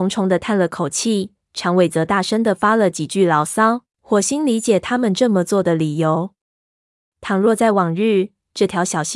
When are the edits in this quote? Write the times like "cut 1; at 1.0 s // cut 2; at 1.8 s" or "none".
cut 1; at 3.9 s